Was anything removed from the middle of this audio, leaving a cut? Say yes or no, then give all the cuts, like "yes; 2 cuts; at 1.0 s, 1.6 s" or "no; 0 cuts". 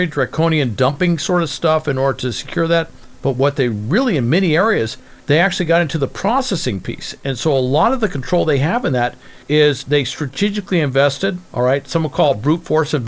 yes; 3 cuts; at 5.2 s, 9.4 s, 11.5 s